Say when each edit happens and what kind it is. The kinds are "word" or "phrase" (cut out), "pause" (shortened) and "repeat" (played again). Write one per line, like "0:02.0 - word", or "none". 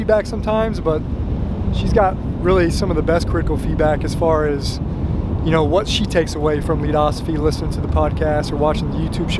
0:06.6 - word